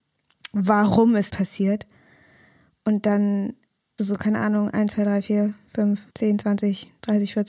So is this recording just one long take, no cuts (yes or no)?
no